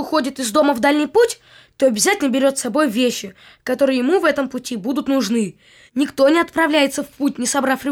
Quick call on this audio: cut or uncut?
uncut